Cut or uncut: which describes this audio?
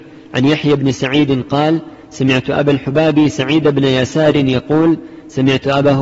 uncut